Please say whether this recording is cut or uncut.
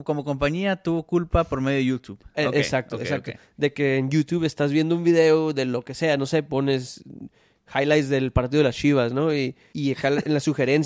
cut